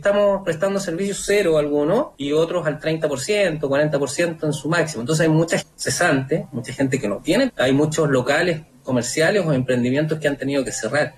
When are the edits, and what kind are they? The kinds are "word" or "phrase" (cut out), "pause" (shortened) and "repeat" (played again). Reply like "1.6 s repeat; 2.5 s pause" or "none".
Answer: 2.1 s pause; 5.6 s word; 7.5 s word